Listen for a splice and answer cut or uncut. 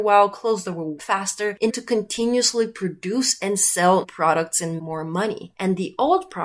cut